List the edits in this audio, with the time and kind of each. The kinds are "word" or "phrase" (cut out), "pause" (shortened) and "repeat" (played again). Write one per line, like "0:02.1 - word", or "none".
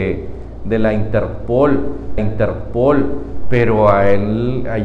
0:02.2 - repeat